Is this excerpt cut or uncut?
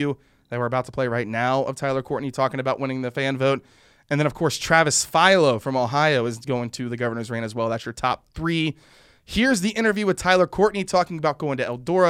uncut